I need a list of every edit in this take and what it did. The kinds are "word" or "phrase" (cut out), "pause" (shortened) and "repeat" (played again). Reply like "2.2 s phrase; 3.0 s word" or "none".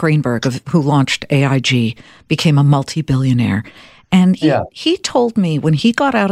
4.4 s word